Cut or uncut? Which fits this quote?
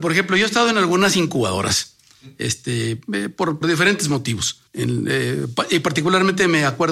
cut